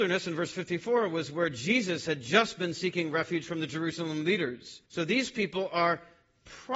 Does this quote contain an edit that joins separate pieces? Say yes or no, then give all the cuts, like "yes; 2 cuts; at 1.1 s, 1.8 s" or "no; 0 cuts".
yes; 1 cut; at 4.9 s